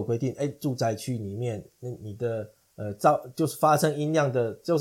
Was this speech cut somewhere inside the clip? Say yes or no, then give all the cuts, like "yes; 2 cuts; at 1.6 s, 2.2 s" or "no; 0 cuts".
no; 0 cuts